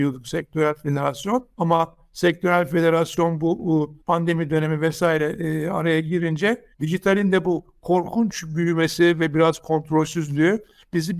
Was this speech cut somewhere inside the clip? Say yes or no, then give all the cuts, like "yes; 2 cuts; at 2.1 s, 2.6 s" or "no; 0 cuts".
yes; 3 cuts; at 1.5 s, 4.0 s, 6.7 s